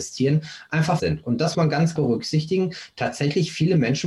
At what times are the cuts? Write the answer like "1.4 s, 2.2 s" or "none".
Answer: 1.0 s, 1.5 s, 2.0 s